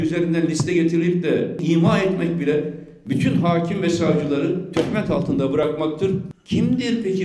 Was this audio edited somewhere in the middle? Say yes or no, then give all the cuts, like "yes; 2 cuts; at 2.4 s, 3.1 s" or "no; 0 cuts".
no; 0 cuts